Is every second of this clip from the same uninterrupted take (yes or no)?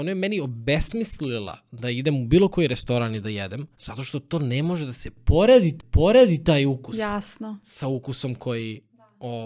no